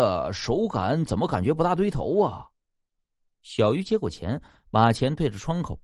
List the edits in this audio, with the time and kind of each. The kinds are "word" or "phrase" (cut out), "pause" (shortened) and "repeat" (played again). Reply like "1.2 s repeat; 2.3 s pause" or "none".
none